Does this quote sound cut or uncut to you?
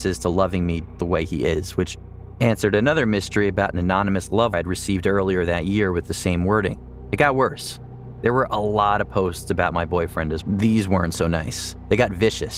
cut